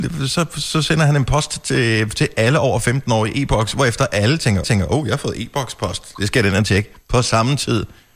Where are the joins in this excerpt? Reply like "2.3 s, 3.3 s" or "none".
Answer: 4.6 s